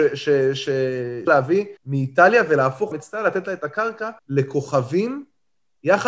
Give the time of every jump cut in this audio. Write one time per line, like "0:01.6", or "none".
0:01.3
0:01.8
0:02.9
0:04.2